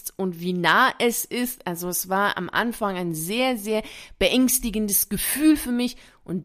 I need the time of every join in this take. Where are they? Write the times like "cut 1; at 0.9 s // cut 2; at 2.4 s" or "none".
none